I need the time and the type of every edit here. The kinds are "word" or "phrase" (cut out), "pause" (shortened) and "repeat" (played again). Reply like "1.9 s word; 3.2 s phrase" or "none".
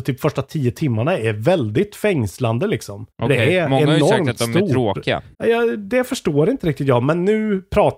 3.1 s pause; 5.3 s pause